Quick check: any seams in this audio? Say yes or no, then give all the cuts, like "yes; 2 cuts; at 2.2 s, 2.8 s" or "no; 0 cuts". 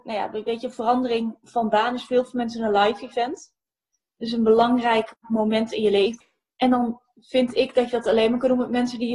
no; 0 cuts